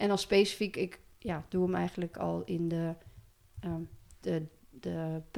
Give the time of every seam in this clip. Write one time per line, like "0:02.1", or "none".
0:02.1
0:04.2